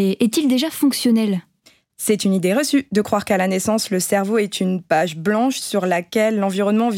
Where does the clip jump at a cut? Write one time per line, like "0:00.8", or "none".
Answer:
none

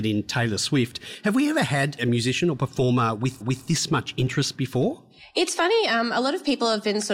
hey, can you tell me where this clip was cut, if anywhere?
0:02.0
0:03.4

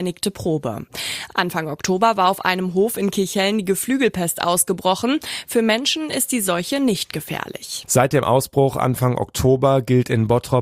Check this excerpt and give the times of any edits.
none

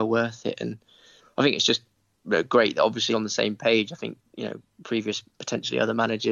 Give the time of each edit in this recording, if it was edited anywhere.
0:03.1
0:05.3

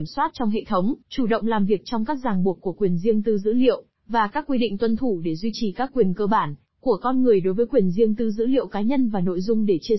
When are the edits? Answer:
0:01.0

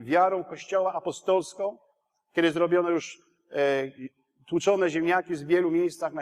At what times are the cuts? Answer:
none

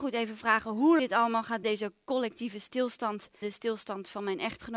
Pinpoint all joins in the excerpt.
0:01.0
0:01.6
0:03.4

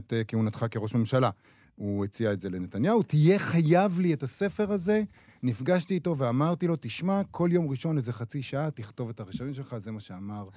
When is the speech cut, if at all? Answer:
none

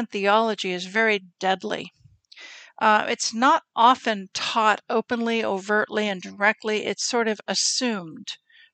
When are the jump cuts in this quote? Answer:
none

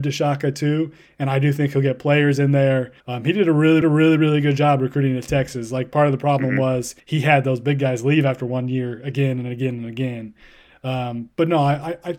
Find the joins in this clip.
0:03.0
0:03.8
0:07.0

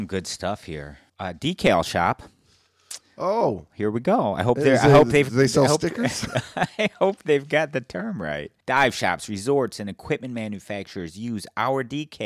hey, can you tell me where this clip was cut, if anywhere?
0:01.1
0:03.7
0:08.6

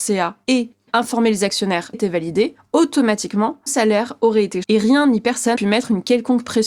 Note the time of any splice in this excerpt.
0:01.9
0:03.7
0:04.6
0:05.5

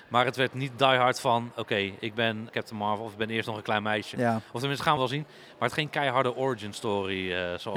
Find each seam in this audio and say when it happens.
0:02.5
0:05.0
0:05.7

